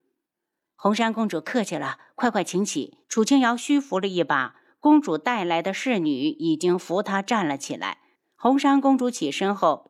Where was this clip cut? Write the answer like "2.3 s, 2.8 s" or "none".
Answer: 3.0 s, 8.1 s